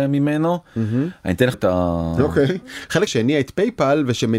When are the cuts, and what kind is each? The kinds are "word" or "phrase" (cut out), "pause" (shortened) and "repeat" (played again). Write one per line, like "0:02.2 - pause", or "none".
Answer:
0:01.5 - word
0:03.1 - word